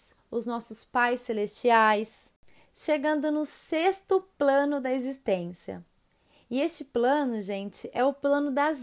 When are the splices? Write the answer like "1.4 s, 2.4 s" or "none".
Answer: none